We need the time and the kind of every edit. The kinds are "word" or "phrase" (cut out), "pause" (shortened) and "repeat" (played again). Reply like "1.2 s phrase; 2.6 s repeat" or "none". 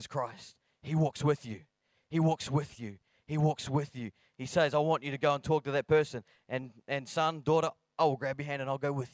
none